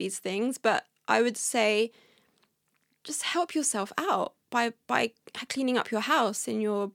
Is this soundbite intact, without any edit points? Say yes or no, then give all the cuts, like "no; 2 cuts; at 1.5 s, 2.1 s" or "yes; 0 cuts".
yes; 0 cuts